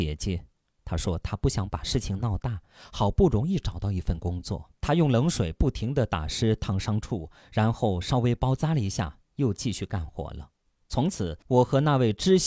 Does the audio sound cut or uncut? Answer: cut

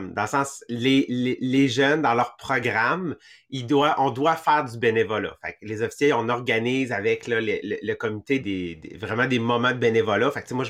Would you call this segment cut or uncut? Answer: cut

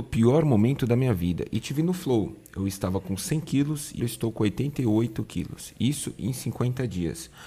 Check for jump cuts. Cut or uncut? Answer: cut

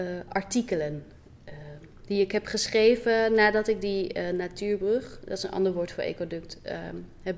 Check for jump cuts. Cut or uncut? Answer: uncut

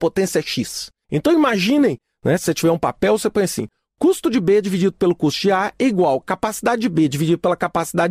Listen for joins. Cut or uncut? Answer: uncut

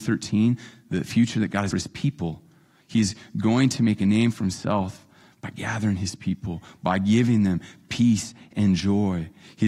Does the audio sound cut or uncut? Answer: cut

